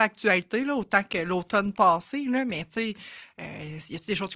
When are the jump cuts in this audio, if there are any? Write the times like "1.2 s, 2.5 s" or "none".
none